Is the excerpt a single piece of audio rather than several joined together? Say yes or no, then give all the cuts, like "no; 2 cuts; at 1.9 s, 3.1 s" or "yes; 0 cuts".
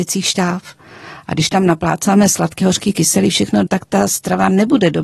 no; 2 cuts; at 2.6 s, 3.7 s